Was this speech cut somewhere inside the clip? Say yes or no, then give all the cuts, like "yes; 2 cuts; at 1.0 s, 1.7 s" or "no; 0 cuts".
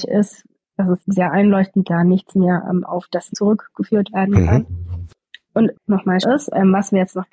yes; 5 cuts; at 1.0 s, 1.8 s, 3.3 s, 5.7 s, 6.2 s